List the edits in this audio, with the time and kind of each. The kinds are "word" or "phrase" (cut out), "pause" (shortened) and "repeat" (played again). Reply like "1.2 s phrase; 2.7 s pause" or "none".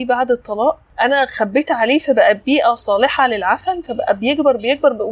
none